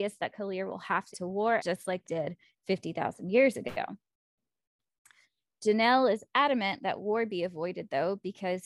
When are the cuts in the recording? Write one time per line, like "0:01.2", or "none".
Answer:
0:01.1
0:01.6
0:02.0